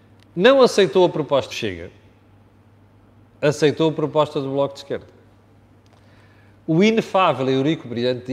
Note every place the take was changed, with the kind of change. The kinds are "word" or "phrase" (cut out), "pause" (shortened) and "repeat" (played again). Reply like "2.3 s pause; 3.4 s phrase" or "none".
1.5 s word